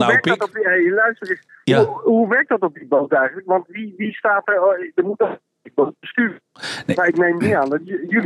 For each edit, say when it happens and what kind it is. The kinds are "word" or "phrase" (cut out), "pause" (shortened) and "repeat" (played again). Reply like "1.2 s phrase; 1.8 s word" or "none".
none

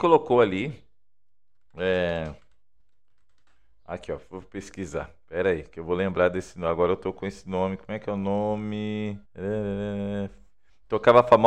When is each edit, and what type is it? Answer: 2.8 s pause; 9.3 s pause

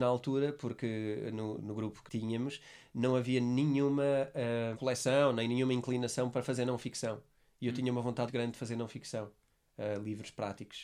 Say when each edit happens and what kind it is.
1.6 s word; 2.1 s word; 4.7 s word; 8.3 s word

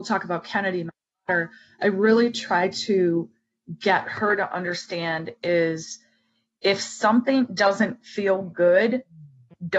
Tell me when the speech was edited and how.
none

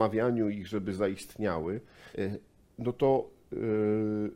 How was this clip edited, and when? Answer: 2.1 s pause

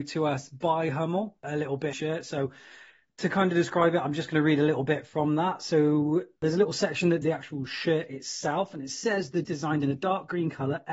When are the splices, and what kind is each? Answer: 1.9 s phrase; 7.2 s word; 9.4 s word

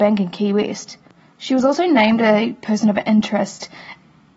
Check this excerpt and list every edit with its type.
none

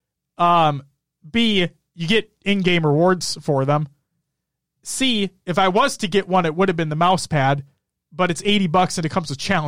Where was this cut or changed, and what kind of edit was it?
none

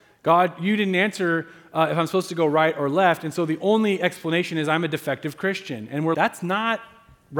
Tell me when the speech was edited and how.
6.1 s word

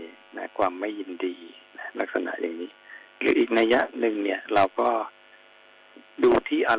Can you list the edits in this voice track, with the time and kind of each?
3.1 s pause

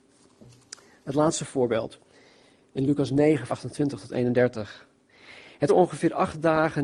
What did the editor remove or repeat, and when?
3.5 s word; 5.7 s word

